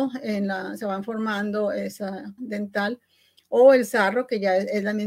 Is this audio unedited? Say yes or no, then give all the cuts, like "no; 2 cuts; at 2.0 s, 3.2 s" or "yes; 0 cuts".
no; 1 cut; at 2.4 s